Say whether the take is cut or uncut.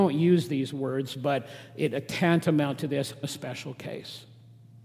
cut